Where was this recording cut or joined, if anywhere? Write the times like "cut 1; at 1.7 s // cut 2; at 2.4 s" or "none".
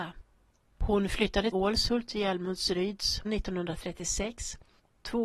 cut 1; at 1.5 s // cut 2; at 3.2 s